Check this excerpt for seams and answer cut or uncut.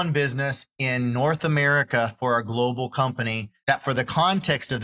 uncut